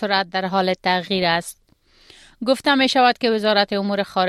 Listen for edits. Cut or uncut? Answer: uncut